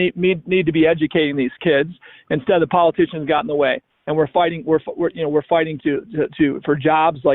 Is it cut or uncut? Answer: uncut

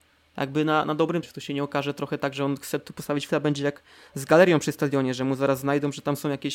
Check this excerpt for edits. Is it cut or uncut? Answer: cut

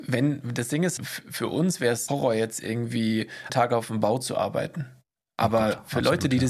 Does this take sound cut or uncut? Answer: cut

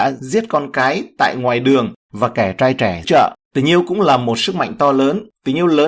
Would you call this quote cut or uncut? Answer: cut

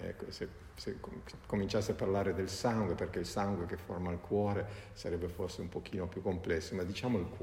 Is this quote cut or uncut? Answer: uncut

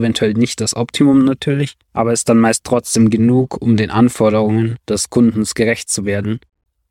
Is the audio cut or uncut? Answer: cut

